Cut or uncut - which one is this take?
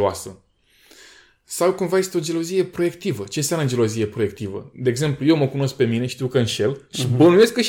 uncut